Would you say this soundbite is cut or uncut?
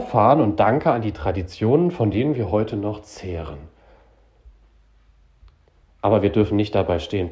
uncut